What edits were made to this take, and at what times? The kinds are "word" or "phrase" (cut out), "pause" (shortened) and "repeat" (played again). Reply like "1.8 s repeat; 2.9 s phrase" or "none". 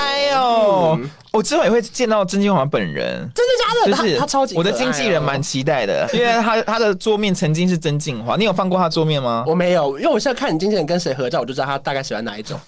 6.1 s word